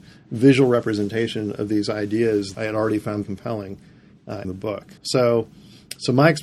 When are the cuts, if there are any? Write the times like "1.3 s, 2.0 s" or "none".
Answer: 2.5 s, 3.2 s, 4.4 s, 5.0 s